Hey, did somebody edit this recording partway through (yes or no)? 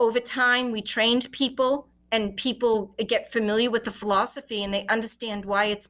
no